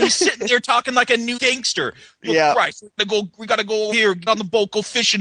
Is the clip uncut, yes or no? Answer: no